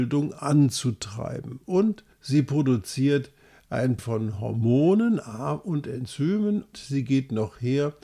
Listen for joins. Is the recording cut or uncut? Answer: cut